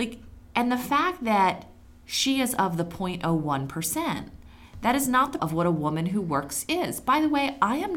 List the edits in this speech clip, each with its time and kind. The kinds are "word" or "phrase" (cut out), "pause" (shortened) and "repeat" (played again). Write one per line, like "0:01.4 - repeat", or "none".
0:05.4 - word